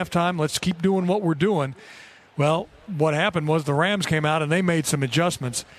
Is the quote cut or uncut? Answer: uncut